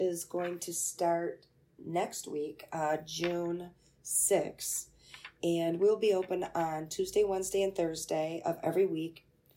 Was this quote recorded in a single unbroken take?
yes; 0 cuts

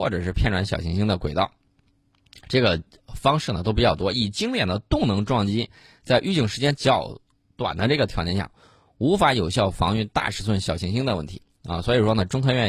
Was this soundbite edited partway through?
no; 0 cuts

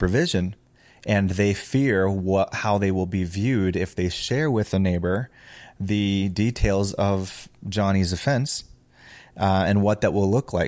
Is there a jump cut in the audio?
no; 0 cuts

